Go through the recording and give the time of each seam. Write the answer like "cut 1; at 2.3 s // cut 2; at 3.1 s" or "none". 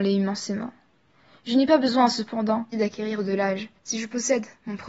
cut 1; at 2.7 s